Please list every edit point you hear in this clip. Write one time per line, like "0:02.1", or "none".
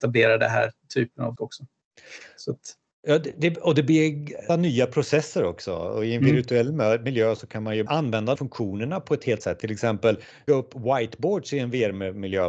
0:01.4
0:04.5
0:07.9
0:08.4
0:09.4
0:10.5